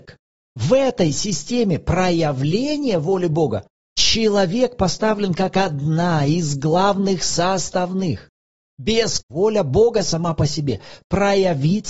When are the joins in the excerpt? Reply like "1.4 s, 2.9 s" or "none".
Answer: 9.2 s